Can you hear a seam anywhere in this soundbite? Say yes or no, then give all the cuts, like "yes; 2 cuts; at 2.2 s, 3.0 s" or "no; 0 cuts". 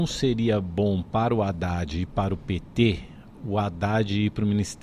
no; 0 cuts